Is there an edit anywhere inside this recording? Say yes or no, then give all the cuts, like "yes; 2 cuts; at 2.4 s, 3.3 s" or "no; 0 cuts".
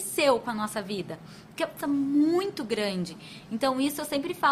yes; 1 cut; at 1.8 s